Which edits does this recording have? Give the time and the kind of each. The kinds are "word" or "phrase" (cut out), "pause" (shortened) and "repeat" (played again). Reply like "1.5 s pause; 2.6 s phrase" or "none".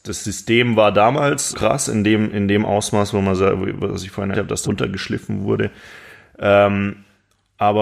1.5 s word; 4.3 s word; 4.6 s word